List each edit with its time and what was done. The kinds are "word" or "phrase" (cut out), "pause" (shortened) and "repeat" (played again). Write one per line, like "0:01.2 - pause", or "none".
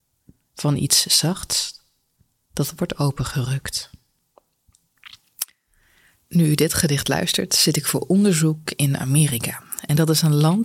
none